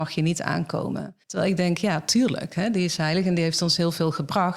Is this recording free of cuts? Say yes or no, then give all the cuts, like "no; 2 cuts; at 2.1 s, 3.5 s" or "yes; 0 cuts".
no; 1 cut; at 1.2 s